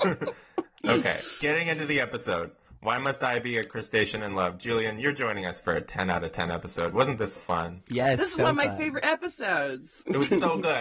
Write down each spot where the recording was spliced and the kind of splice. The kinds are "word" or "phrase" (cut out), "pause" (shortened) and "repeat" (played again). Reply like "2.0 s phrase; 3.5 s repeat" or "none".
7.4 s word